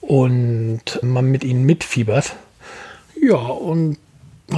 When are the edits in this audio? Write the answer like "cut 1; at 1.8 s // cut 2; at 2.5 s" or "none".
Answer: cut 1; at 1.0 s

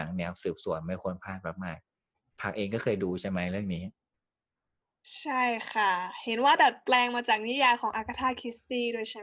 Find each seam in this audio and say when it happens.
cut 1; at 1.8 s

